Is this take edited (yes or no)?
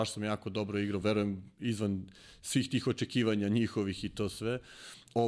no